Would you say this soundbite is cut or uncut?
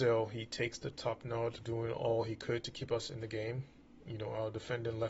cut